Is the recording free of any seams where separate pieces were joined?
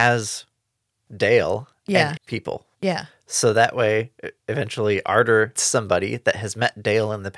no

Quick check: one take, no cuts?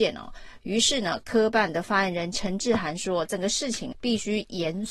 no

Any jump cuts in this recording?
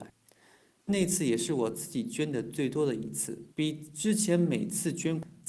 yes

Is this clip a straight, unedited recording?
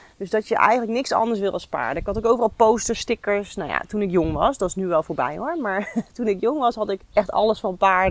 no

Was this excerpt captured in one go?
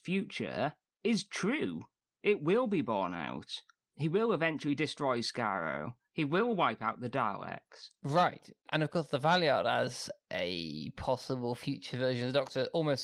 yes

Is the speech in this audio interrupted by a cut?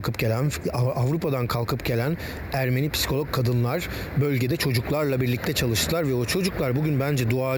no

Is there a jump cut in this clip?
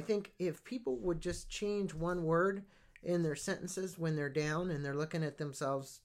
no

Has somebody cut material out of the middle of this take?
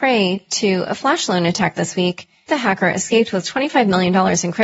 yes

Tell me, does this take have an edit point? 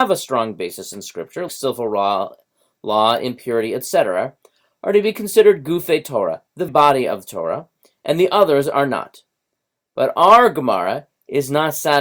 yes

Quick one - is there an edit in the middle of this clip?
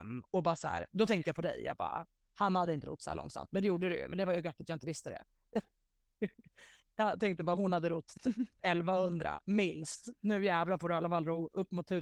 no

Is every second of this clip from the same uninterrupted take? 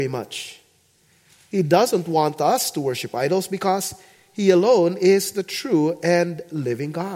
yes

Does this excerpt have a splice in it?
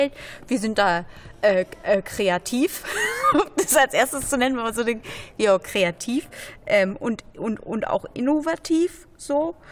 no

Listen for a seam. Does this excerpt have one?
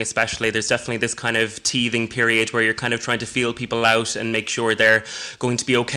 no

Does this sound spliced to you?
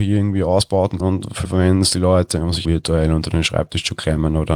yes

